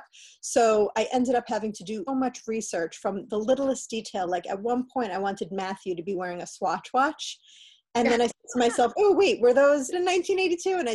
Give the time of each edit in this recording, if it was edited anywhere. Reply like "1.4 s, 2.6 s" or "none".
2.1 s, 9.9 s